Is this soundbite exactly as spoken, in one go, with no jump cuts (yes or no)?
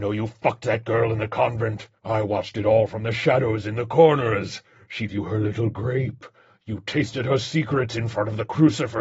no